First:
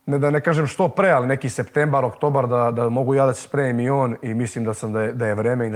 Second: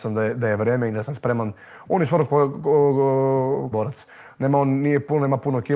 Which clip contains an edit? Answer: second; 1 cut; at 3.7 s

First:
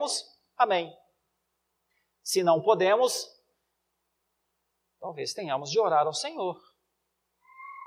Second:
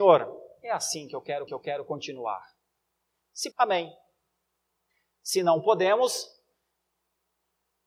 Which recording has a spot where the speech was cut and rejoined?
second; 2 cuts; at 1.5 s, 3.5 s

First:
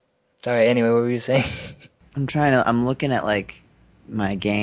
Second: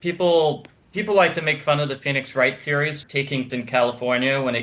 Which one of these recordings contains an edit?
second; 2 cuts; at 3.0 s, 3.5 s

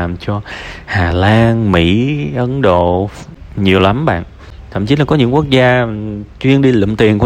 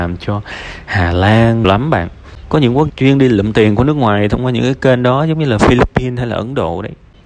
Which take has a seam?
second; 3 cuts; at 1.6 s, 2.5 s, 2.9 s

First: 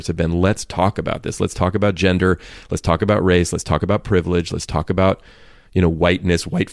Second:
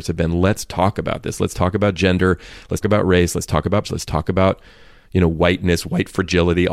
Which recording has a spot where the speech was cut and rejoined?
second; 2 cuts; at 2.8 s, 3.8 s

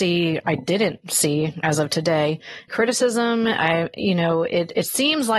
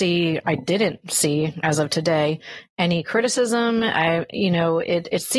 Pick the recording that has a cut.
first; 1 cut; at 2.7 s

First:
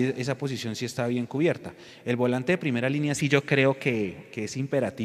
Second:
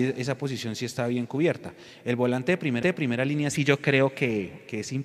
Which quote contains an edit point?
second; 1 cut; at 2.8 s

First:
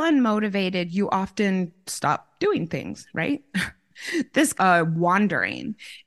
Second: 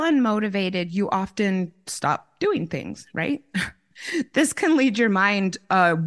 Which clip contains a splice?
first; 1 cut; at 4.5 s

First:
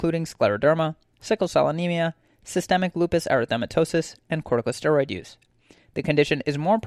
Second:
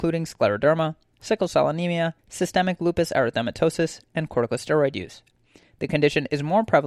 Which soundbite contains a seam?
second; 1 cut; at 2.2 s

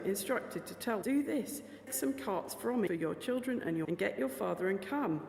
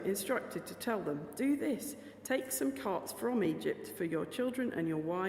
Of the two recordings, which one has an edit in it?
first; 4 cuts; at 1.0 s, 1.9 s, 2.9 s, 3.8 s

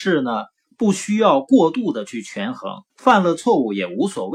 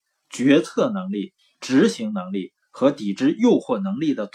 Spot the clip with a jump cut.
first; 1 cut; at 2.9 s

